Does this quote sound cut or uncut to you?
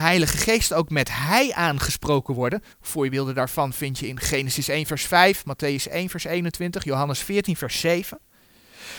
cut